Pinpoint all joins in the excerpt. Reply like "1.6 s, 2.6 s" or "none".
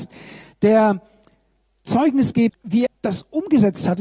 1.9 s, 2.5 s, 2.9 s